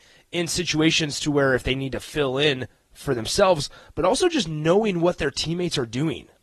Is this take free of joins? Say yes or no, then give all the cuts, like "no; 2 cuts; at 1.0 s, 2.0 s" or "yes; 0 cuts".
yes; 0 cuts